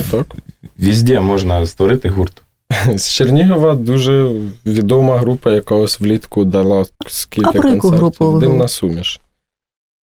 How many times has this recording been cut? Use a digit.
1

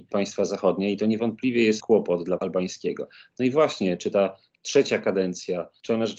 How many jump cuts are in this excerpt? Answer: 2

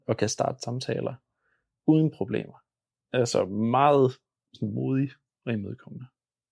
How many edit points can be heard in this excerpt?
0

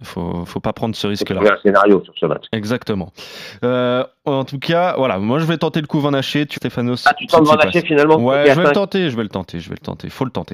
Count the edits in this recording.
1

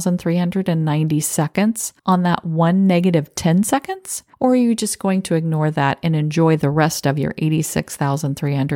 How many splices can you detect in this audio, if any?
2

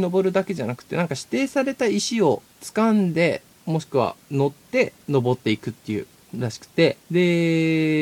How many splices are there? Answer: 5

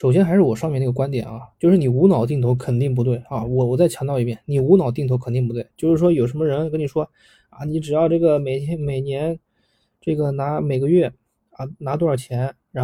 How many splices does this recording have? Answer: 1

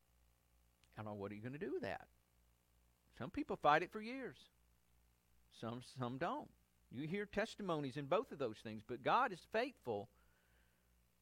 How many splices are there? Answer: 0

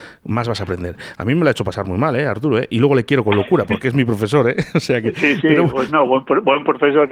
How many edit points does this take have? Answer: 0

